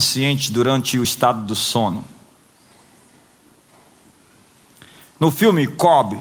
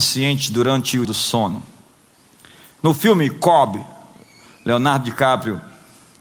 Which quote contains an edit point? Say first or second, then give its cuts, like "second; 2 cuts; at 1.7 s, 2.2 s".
second; 2 cuts; at 1.0 s, 2.2 s